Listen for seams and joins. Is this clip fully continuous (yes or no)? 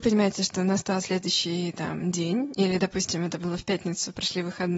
yes